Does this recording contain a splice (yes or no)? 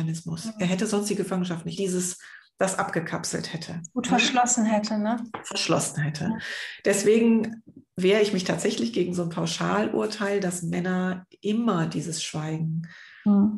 yes